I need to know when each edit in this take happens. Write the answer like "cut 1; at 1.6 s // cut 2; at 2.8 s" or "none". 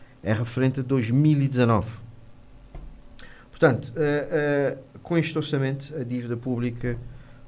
cut 1; at 4.9 s